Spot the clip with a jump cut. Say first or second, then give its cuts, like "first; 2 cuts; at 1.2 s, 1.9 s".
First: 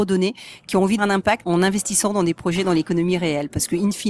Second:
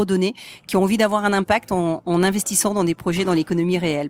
first; 2 cuts; at 1.0 s, 1.4 s